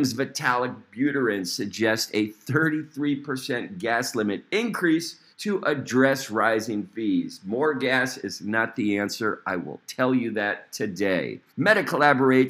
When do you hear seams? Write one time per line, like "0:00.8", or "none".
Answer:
0:05.3
0:11.5